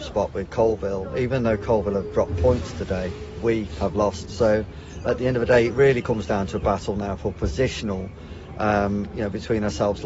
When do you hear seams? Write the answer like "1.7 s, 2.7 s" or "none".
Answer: none